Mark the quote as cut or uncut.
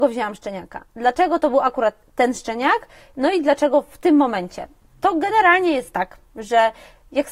uncut